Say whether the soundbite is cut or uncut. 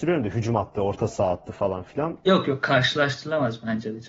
uncut